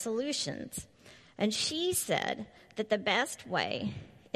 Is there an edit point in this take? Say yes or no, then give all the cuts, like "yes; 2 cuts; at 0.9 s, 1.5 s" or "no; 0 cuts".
no; 0 cuts